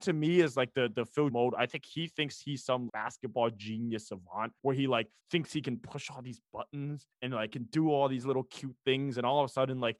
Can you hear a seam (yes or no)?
yes